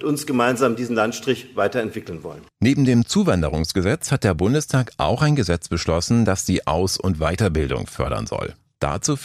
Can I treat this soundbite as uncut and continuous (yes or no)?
yes